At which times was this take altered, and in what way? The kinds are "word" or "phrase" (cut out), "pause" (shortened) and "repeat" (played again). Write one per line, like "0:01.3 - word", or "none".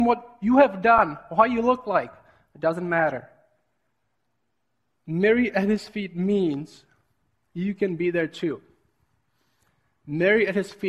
none